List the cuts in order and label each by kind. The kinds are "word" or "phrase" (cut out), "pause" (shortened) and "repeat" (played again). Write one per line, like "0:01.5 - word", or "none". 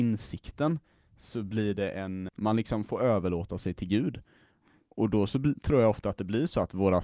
0:02.3 - word